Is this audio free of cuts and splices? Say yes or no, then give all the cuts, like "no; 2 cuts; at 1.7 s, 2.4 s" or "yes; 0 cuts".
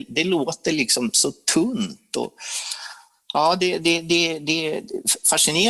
yes; 0 cuts